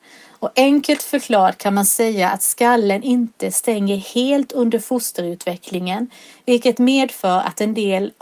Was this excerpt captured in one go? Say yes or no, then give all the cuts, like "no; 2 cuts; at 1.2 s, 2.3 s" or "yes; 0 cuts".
yes; 0 cuts